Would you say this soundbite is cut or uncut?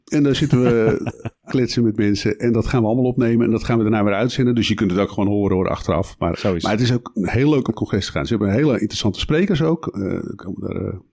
cut